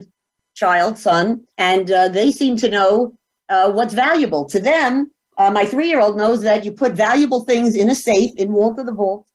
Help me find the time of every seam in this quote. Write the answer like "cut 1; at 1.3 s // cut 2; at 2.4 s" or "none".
cut 1; at 1.5 s